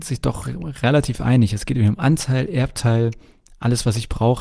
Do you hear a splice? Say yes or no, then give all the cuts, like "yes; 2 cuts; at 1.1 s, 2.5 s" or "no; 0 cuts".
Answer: no; 0 cuts